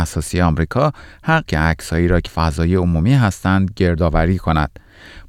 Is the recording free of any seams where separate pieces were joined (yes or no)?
no